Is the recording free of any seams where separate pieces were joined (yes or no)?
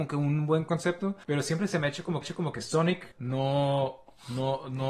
no